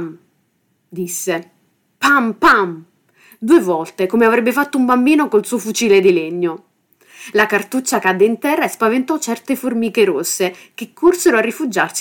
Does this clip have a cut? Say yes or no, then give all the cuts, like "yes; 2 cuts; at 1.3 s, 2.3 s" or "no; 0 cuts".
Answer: no; 0 cuts